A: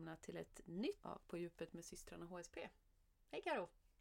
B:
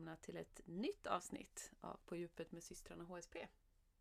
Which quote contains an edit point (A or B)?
A